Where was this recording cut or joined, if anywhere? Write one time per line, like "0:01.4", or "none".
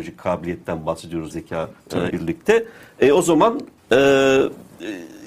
0:01.3
0:01.8
0:02.1
0:03.8